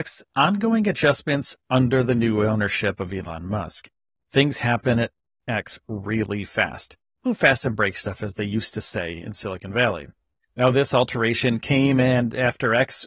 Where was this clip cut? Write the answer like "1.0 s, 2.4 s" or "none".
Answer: none

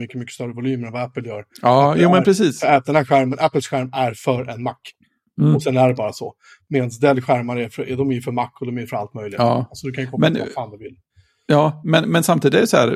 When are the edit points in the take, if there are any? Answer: none

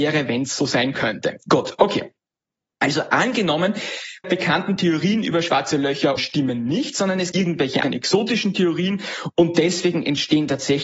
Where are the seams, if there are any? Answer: 4.2 s, 6.2 s, 7.3 s, 7.8 s

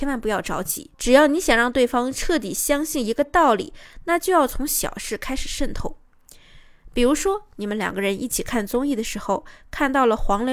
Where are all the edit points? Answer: none

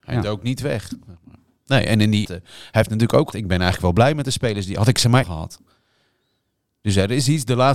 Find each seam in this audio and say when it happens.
2.2 s, 3.3 s, 5.2 s

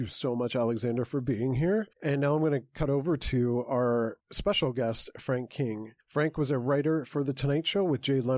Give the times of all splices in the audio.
1.9 s, 4.2 s, 6.0 s

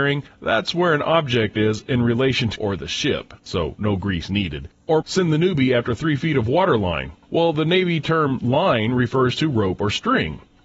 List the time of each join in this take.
2.6 s, 3.4 s, 5.0 s

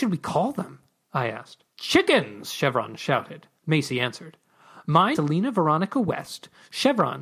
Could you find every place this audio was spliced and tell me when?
1.7 s, 3.6 s, 5.1 s

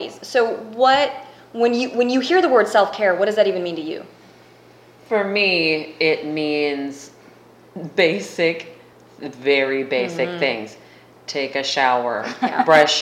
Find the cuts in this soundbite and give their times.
none

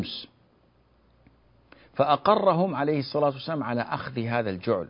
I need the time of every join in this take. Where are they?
none

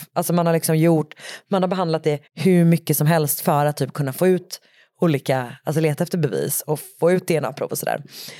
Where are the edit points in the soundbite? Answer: 2.3 s

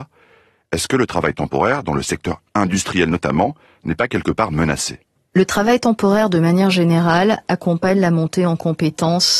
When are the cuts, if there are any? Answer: none

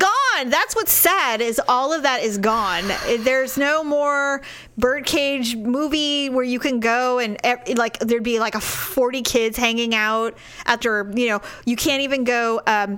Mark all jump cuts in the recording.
10.8 s

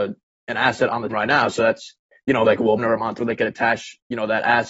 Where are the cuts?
1.1 s, 1.6 s, 2.4 s, 2.8 s, 3.2 s

